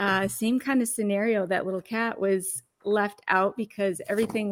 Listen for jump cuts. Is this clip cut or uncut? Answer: uncut